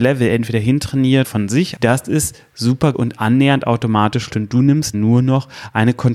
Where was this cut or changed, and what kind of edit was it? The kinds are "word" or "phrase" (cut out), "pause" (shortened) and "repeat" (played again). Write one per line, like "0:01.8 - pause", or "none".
0:01.2 - word
0:01.8 - word
0:02.9 - word
0:04.3 - word
0:04.9 - word